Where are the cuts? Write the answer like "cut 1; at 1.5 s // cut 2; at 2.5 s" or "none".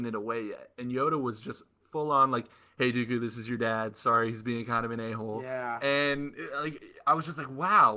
none